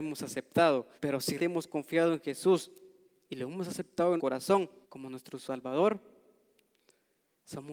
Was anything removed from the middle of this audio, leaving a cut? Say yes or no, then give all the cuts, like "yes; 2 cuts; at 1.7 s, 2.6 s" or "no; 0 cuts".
yes; 4 cuts; at 1.0 s, 1.4 s, 4.2 s, 4.8 s